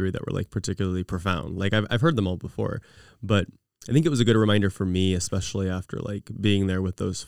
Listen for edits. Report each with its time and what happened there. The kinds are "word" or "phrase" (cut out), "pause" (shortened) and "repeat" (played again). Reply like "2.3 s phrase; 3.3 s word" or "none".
none